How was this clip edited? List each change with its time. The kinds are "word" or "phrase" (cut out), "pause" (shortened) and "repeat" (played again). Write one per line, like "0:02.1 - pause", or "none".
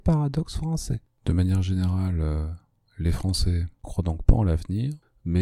0:03.8 - word